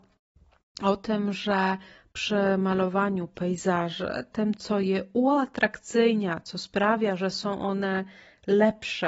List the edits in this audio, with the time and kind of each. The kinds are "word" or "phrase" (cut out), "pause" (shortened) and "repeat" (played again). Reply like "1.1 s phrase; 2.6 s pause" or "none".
none